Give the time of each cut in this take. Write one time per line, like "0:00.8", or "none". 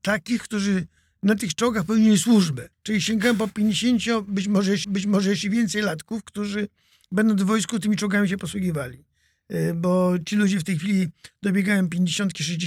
0:02.7
0:04.8